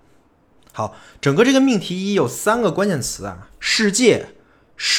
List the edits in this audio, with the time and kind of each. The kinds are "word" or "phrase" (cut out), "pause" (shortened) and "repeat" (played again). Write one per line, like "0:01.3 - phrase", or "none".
none